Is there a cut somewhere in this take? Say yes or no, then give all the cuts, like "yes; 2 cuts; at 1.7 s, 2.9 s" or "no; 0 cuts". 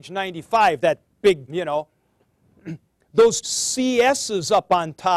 yes; 2 cuts; at 1.5 s, 3.4 s